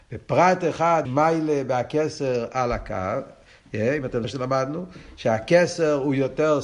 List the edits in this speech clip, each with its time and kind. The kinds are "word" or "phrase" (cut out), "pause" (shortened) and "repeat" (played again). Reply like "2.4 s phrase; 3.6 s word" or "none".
1.0 s word; 4.2 s word